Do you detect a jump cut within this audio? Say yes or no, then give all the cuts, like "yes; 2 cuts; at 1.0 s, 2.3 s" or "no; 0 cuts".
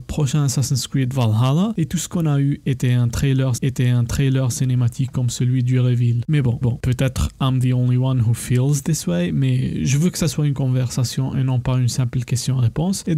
yes; 2 cuts; at 3.6 s, 6.6 s